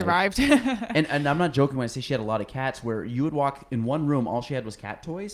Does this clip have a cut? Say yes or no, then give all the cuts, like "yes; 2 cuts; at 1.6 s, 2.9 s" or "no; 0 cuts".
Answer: no; 0 cuts